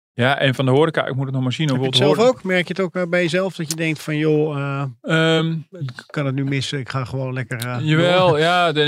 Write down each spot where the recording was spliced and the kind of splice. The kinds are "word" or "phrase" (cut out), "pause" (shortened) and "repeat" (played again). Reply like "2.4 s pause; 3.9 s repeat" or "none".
none